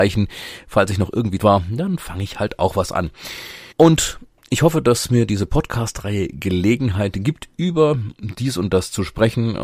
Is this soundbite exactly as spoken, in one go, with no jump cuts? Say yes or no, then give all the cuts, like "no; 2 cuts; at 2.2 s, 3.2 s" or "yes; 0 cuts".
no; 2 cuts; at 1.4 s, 3.7 s